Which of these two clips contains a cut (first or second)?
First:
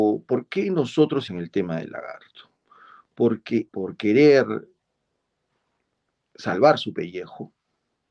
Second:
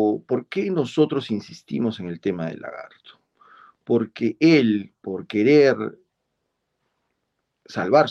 first